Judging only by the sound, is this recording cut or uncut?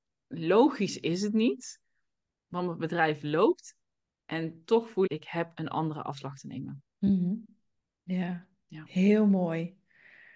cut